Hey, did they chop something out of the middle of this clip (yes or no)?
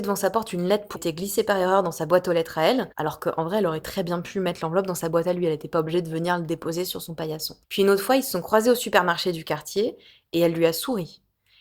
yes